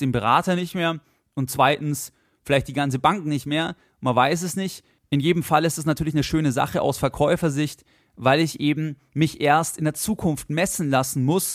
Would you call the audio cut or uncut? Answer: uncut